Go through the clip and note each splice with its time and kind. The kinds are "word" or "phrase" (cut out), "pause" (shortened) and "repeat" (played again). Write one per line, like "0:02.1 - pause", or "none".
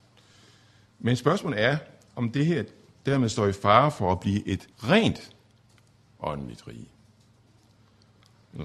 0:04.7 - pause